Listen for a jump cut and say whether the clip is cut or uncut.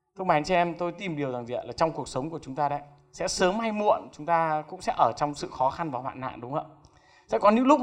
uncut